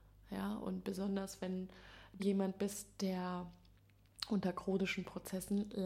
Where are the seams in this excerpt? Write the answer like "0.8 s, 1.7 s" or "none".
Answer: 2.2 s